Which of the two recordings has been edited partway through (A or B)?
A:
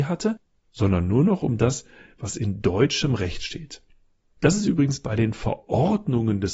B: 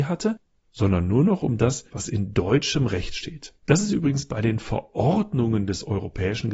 B